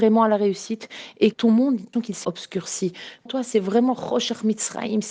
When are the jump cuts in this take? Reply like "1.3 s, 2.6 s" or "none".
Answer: 1.3 s, 1.9 s, 2.2 s, 3.3 s